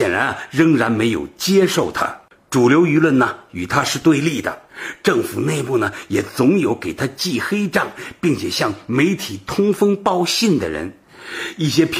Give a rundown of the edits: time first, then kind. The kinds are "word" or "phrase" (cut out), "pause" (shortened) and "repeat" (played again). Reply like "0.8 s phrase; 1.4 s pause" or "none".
none